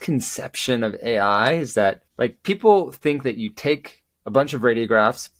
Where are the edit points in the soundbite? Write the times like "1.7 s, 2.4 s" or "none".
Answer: 2.1 s